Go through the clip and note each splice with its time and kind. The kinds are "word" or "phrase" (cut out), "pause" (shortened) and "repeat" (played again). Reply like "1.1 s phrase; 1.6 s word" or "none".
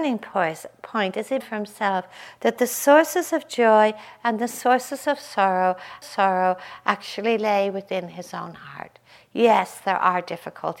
1.4 s phrase; 6.0 s repeat